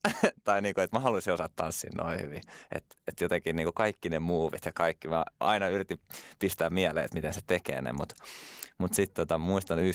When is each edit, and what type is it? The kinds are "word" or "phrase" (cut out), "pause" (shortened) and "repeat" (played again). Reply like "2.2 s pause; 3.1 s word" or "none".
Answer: none

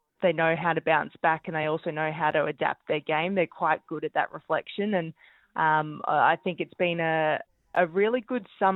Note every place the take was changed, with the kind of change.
none

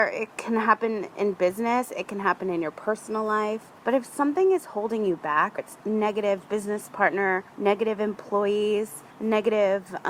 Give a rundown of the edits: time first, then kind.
3.8 s pause; 5.6 s word; 7.5 s pause; 9.1 s pause

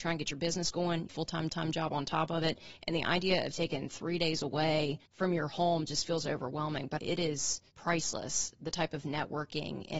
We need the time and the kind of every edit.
1.1 s phrase; 1.5 s repeat; 5.1 s pause; 7.0 s phrase; 7.7 s pause

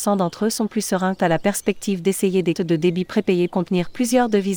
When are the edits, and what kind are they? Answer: 1.2 s word; 2.5 s word; 3.5 s word

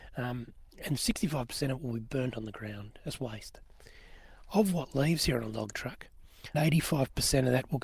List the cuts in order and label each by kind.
1.0 s word; 6.5 s word

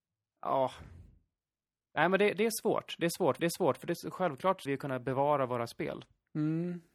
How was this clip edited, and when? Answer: 3.4 s repeat; 4.7 s phrase

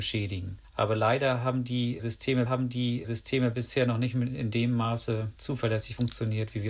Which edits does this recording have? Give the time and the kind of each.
2.5 s repeat

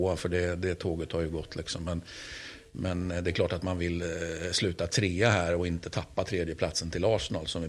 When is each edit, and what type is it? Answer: none

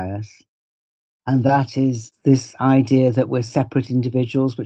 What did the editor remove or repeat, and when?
none

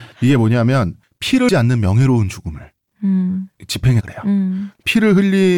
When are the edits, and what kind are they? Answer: 1.5 s word; 4.0 s word

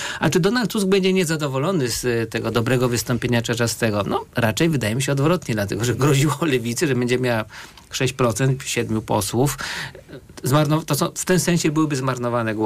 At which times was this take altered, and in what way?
none

